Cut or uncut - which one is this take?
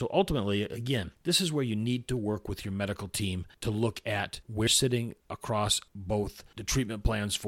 cut